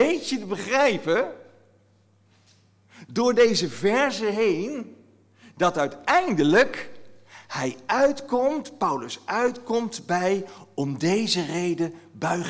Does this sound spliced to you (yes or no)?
no